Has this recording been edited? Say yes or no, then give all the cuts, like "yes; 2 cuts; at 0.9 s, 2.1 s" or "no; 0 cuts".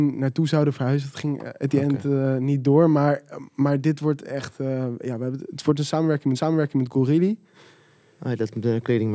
yes; 1 cut; at 6.3 s